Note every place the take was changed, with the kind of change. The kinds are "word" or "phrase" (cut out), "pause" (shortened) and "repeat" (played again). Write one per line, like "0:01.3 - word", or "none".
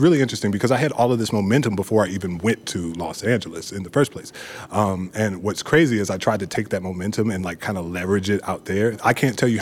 none

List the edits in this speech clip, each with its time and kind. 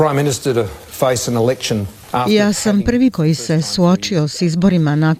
0:03.1 - word

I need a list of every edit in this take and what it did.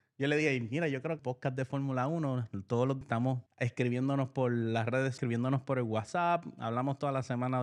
0:01.2 - phrase
0:03.0 - word
0:03.5 - pause
0:05.2 - word

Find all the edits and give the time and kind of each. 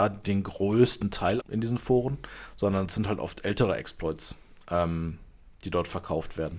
0:01.4 - word

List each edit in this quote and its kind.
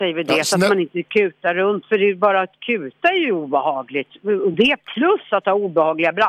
none

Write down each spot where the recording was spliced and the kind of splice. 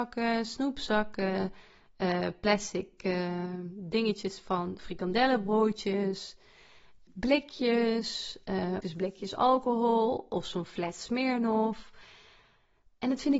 0:07.1 - word
0:08.8 - word

